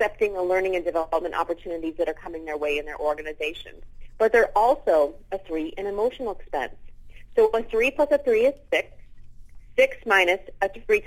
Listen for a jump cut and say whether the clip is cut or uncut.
uncut